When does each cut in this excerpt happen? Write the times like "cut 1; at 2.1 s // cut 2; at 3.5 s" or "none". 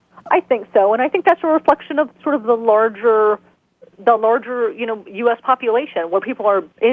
none